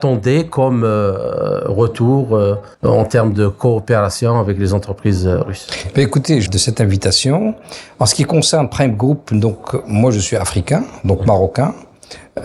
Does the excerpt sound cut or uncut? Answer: cut